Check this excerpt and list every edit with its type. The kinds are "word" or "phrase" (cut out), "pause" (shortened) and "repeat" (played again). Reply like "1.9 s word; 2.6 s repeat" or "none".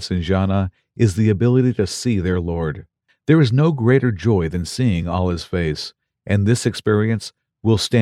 none